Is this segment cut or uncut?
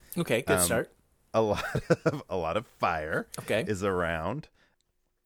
uncut